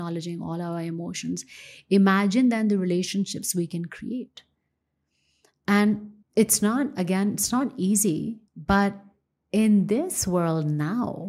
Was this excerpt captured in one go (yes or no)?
no